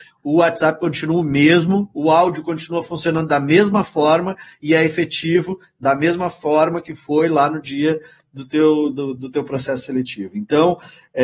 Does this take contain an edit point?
no; 0 cuts

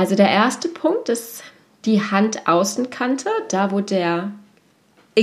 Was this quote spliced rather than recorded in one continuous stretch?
no; 0 cuts

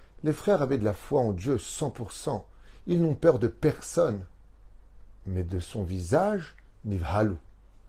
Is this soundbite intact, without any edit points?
yes; 0 cuts

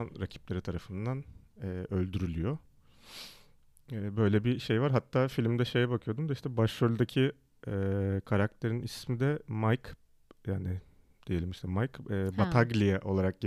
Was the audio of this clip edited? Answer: no; 0 cuts

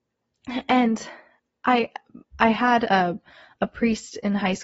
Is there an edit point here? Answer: no; 0 cuts

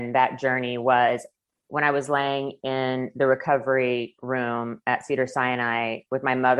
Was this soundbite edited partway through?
no; 0 cuts

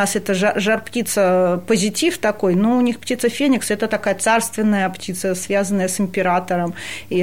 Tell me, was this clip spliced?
no; 0 cuts

